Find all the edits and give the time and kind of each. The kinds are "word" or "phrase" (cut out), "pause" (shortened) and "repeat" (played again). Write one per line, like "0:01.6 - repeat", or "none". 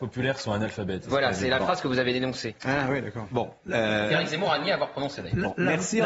none